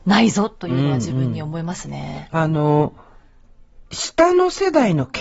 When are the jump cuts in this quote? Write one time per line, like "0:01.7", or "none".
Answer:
0:03.9